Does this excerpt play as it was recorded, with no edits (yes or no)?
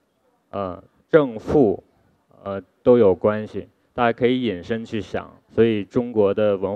no